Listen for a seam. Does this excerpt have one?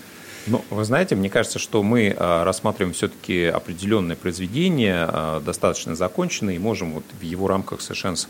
no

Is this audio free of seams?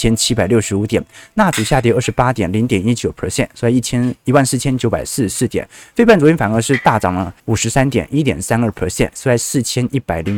no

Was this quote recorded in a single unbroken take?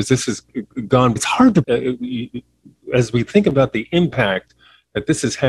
no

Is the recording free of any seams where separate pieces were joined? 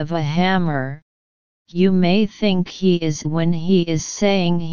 no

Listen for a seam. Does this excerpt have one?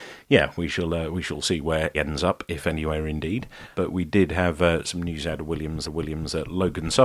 yes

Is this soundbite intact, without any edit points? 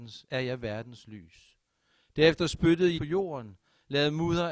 no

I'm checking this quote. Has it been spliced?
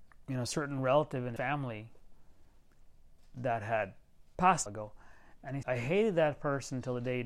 yes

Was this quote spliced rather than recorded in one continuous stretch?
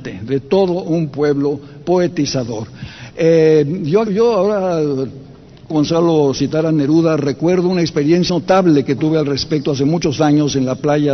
yes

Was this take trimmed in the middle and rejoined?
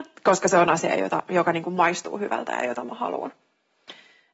no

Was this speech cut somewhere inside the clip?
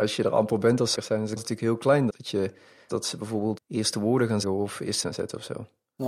yes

